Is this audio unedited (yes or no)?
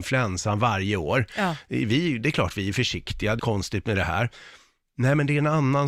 no